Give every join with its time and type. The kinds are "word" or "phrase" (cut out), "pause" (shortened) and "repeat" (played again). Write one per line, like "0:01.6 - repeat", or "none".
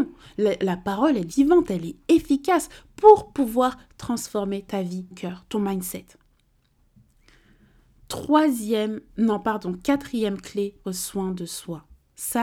0:01.3 - word
0:05.1 - word
0:10.8 - word